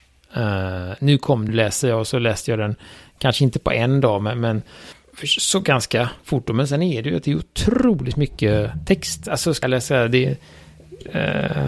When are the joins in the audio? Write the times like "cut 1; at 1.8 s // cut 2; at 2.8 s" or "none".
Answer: cut 1; at 1.5 s // cut 2; at 6.2 s // cut 3; at 9.6 s